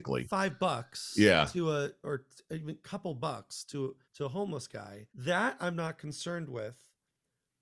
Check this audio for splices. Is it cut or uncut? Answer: cut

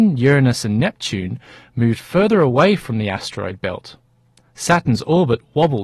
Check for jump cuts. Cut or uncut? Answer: uncut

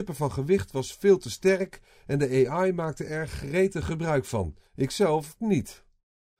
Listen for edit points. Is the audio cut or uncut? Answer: cut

